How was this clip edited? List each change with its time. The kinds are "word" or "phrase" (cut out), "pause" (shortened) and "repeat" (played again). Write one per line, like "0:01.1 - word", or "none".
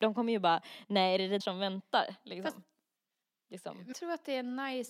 0:01.4 - word
0:03.9 - word